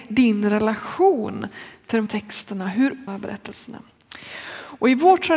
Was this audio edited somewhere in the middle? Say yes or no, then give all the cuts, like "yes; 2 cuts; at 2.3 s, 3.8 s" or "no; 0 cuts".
yes; 2 cuts; at 2.1 s, 3.1 s